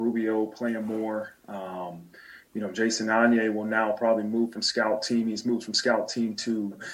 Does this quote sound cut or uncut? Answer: uncut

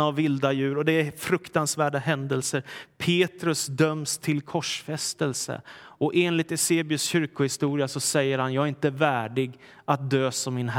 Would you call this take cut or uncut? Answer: uncut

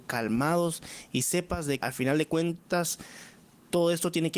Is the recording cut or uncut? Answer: cut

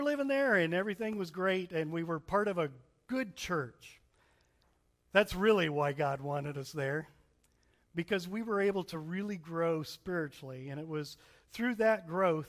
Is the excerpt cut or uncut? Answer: uncut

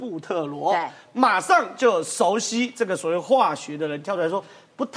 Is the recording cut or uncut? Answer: uncut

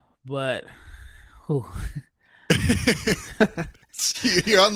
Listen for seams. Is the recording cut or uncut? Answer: uncut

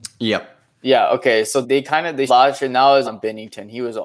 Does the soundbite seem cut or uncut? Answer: cut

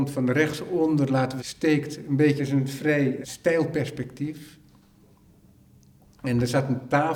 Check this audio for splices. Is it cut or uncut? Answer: cut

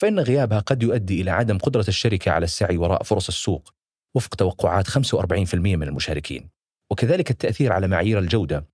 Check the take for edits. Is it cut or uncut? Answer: uncut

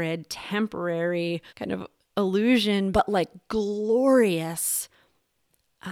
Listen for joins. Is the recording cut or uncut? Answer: cut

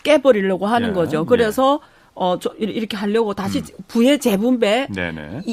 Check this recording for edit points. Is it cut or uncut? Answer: uncut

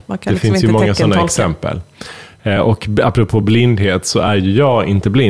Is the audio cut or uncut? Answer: uncut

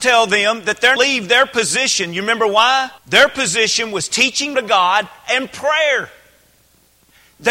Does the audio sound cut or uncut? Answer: cut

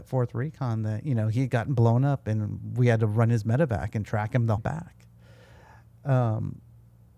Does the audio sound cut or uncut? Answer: cut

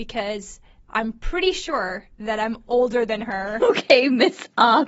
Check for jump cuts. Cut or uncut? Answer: uncut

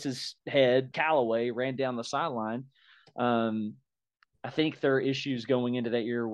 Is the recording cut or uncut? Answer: cut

